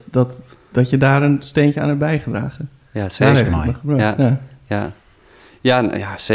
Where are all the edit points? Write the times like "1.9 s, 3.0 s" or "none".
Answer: none